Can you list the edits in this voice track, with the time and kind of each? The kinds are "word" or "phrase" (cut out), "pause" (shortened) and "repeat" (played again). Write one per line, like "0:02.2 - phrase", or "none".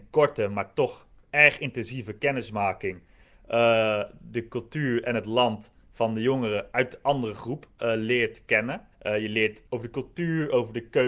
0:08.9 - pause
0:09.7 - pause